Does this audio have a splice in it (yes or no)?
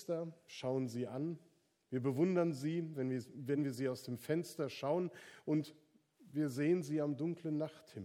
no